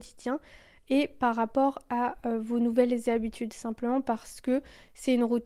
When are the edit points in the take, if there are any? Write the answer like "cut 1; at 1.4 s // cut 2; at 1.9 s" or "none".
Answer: none